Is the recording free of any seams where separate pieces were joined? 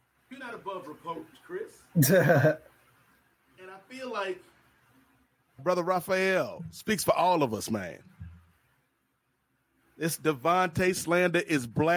no; 2 cuts; at 1.3 s, 5.6 s

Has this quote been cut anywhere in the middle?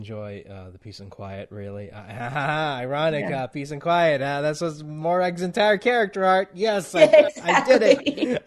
no; 0 cuts

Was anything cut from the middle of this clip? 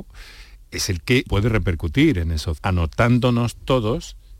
yes; 2 cuts; at 1.3 s, 2.6 s

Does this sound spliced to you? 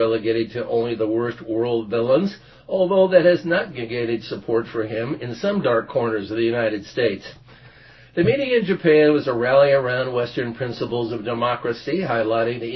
no; 0 cuts

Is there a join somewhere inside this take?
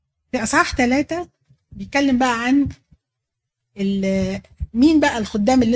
no; 0 cuts

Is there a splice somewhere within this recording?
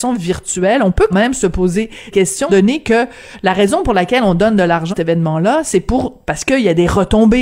yes; 4 cuts; at 1.1 s, 2.1 s, 2.5 s, 4.9 s

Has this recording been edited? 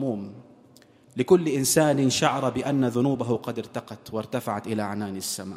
no; 0 cuts

